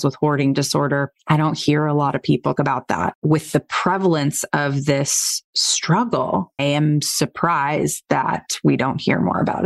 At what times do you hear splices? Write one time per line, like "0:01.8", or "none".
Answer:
0:02.5
0:06.6